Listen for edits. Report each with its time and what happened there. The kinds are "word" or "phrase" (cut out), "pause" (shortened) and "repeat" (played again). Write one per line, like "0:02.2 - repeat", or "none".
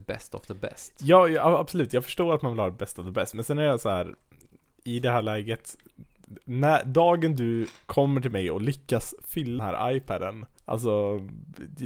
0:09.6 - word
0:10.6 - pause